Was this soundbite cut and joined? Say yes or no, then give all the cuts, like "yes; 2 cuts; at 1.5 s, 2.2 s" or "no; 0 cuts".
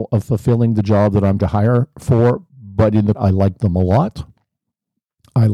yes; 3 cuts; at 1.4 s, 2.5 s, 3.1 s